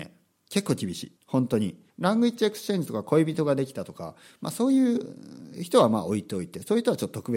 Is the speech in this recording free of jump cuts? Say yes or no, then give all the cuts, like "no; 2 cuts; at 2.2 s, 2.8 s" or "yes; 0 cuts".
no; 2 cuts; at 1.2 s, 1.9 s